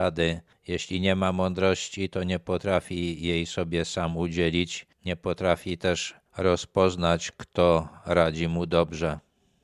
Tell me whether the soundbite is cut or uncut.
uncut